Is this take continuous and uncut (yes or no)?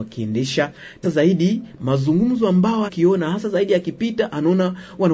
no